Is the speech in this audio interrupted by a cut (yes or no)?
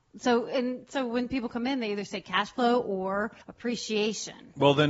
yes